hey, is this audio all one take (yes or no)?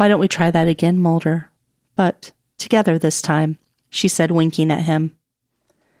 yes